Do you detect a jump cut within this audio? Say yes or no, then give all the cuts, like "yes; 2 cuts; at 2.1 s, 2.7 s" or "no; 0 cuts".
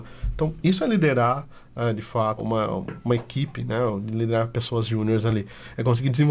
yes; 1 cut; at 2.4 s